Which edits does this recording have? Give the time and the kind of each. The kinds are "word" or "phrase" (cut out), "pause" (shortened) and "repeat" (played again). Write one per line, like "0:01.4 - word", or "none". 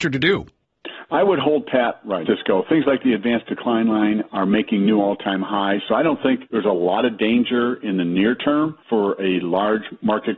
0:02.3 - word
0:06.5 - pause
0:08.8 - pause